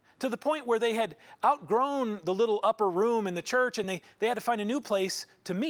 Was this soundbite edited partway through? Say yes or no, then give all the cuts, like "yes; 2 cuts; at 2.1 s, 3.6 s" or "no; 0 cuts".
no; 0 cuts